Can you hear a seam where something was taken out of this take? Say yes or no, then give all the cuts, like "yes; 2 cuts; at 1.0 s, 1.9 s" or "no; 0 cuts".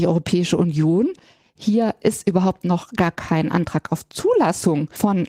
no; 0 cuts